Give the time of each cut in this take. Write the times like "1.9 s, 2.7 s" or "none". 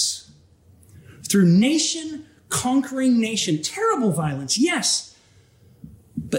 none